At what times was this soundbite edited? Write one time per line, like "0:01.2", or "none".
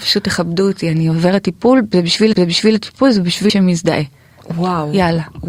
0:02.3
0:03.5